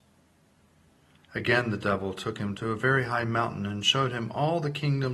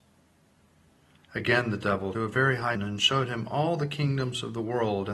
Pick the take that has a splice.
second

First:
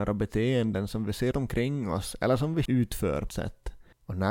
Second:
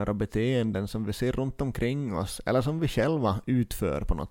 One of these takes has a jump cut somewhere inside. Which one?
first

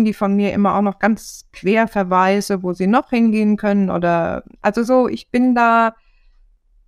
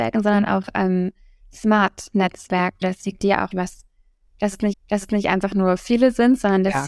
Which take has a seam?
second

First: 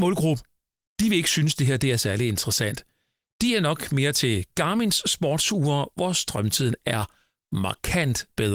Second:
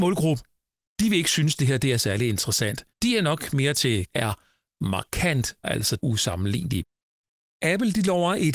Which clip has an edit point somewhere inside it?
second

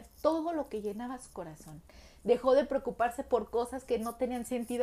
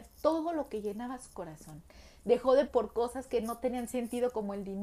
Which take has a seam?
second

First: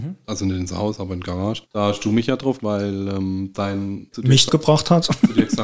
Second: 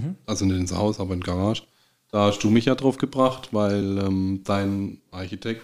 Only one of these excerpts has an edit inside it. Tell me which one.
first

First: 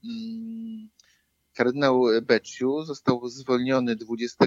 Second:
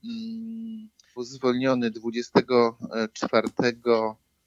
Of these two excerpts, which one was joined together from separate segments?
second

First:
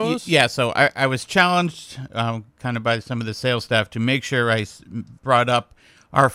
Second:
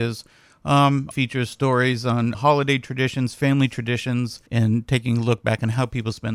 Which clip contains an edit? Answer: second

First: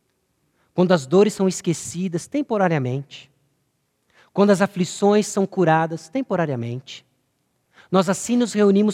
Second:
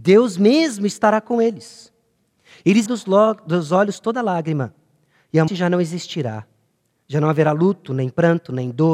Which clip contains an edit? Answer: second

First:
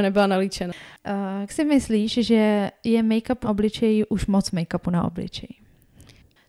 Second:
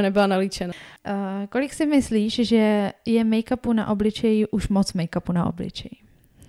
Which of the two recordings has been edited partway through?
first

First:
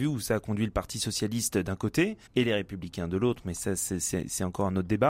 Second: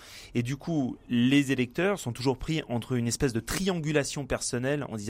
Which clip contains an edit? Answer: first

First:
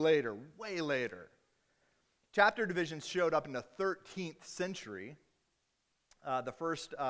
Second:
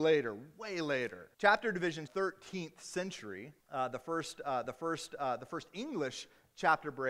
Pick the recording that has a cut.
second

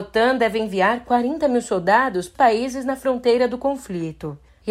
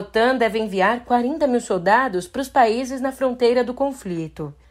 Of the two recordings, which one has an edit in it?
first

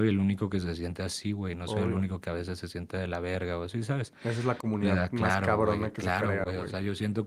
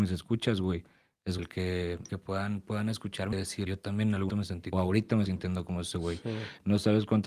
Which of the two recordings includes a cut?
second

